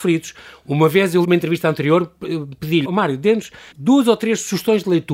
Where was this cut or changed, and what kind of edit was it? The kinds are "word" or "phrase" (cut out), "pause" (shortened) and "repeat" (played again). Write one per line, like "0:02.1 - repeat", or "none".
0:01.2 - phrase
0:02.8 - word
0:03.7 - pause